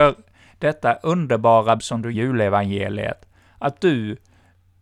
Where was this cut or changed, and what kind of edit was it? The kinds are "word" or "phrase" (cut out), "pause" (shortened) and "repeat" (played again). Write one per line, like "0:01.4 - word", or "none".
0:01.8 - word
0:02.1 - phrase